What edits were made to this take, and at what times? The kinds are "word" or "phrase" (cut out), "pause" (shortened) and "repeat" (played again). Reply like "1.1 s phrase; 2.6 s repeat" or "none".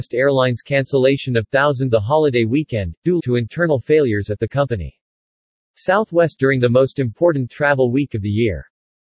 1.9 s phrase; 3.2 s word; 6.4 s phrase